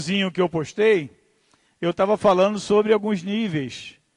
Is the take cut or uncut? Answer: uncut